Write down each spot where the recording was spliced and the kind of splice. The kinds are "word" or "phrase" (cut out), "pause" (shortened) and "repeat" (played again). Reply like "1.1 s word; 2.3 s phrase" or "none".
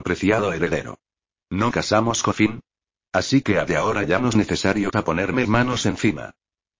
1.7 s word; 2.3 s word; 3.7 s word; 4.3 s word; 4.9 s word; 5.4 s word

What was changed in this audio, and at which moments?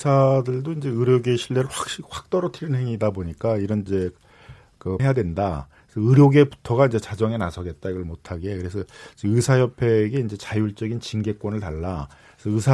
3.9 s phrase; 5.0 s phrase

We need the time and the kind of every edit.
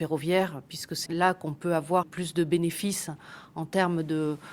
1.1 s word; 2.0 s word

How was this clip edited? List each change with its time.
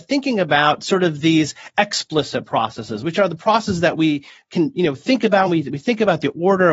none

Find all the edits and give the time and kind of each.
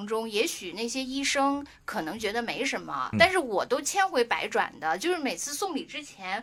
3.1 s word

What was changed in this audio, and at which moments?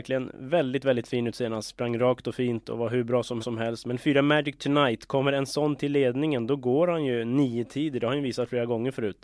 3.4 s repeat

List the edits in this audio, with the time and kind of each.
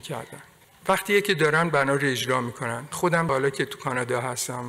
2.9 s word

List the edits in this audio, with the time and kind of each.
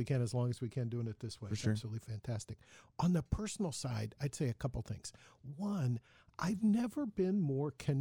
none

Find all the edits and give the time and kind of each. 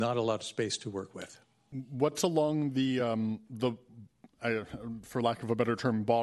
none

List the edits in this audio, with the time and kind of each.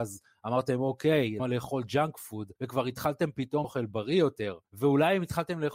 1.4 s word; 2.6 s pause; 3.6 s word; 4.7 s pause

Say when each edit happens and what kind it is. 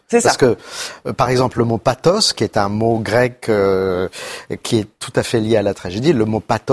none

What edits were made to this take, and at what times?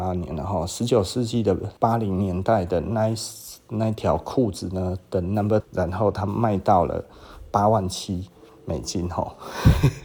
1.8 s pause; 5.6 s word

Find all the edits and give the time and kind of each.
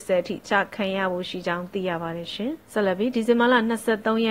2.7 s pause

